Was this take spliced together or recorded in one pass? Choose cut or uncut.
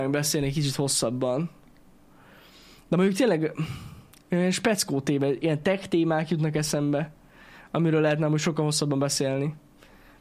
uncut